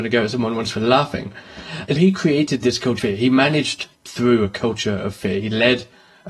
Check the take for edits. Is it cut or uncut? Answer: cut